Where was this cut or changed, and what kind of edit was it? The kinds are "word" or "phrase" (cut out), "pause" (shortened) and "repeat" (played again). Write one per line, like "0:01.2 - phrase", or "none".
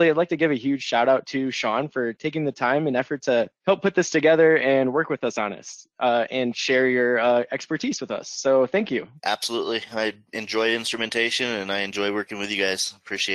0:03.6 - pause
0:09.2 - pause